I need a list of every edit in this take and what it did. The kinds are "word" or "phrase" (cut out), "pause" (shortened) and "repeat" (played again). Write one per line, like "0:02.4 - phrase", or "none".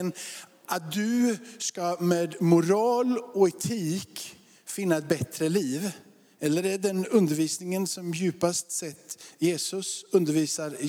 none